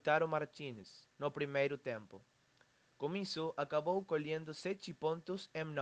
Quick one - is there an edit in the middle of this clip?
yes; 1 cut; at 1.1 s

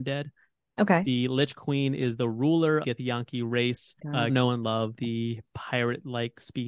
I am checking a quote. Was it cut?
yes; 4 cuts; at 2.8 s, 4.0 s, 4.3 s, 5.0 s

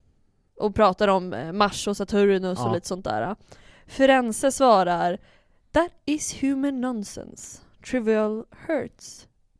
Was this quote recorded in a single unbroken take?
yes; 0 cuts

